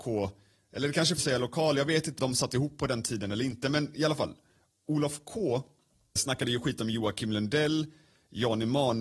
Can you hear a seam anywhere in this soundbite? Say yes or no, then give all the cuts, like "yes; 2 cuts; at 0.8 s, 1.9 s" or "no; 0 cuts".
yes; 3 cuts; at 1.2 s, 2.2 s, 6.2 s